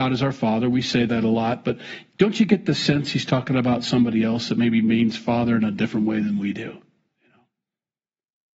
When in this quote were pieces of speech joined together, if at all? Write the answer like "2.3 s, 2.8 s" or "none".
none